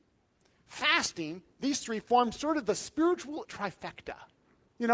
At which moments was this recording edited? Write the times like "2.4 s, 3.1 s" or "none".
3.4 s

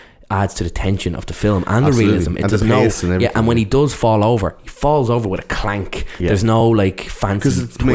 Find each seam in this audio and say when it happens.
none

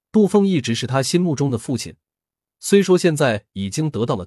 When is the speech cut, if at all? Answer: none

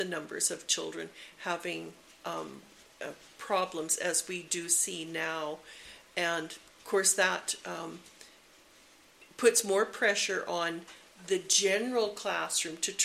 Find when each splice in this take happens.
none

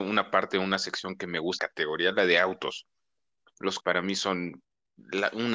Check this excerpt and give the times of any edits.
1.6 s, 3.8 s

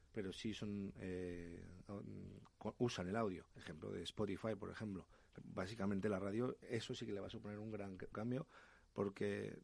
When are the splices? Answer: 3.5 s, 5.4 s, 8.1 s

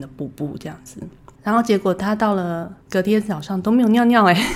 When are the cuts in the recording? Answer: 1.3 s, 2.8 s

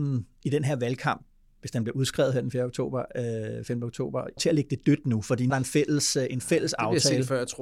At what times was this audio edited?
4.4 s, 5.5 s

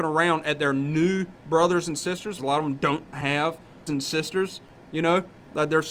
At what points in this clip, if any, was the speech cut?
2.4 s, 3.9 s

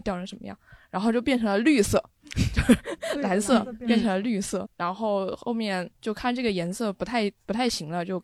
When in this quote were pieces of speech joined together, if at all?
4.7 s, 5.9 s

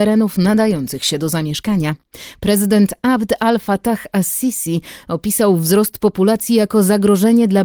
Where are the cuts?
none

